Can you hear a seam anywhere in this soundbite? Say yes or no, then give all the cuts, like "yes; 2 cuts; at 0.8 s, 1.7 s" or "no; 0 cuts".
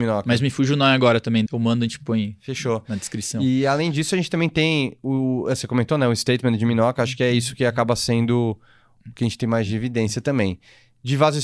yes; 1 cut; at 1.5 s